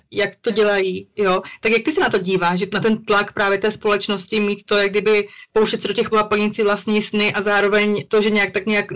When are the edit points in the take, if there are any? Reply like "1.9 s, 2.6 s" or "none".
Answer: 6.1 s, 8.1 s